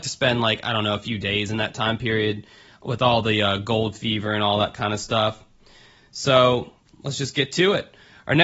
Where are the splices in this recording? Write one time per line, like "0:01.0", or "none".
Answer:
none